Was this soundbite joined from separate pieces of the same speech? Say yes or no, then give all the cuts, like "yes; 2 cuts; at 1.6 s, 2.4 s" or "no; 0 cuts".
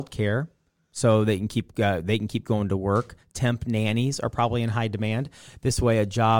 no; 0 cuts